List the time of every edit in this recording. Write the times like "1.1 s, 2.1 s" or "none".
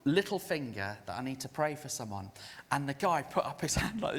none